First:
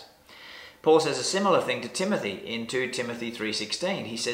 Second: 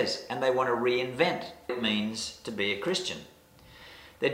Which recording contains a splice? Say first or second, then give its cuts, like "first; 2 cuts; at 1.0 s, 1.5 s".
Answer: second; 1 cut; at 1.7 s